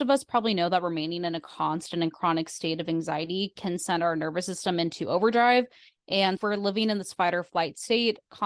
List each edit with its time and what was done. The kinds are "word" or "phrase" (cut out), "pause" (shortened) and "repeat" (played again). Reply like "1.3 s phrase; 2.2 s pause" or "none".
6.4 s word